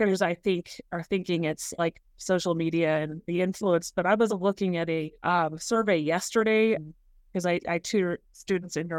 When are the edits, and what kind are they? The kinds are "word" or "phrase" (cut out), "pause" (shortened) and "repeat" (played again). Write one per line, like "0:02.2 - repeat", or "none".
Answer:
0:04.3 - word
0:05.1 - pause
0:06.7 - word